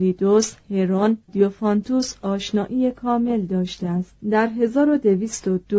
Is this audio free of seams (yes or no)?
no